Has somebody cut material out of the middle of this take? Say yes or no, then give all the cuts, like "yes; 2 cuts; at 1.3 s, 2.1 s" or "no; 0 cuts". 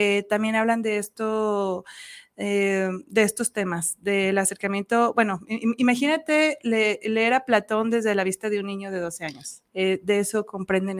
yes; 1 cut; at 9.7 s